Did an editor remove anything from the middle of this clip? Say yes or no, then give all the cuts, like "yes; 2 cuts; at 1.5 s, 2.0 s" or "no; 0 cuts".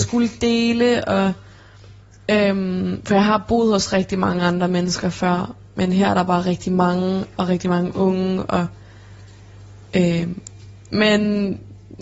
no; 0 cuts